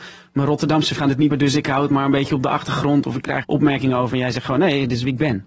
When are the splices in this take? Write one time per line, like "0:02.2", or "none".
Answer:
0:01.0
0:01.3
0:03.4